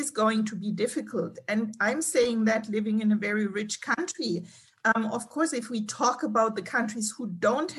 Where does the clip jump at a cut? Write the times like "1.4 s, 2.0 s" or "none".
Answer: none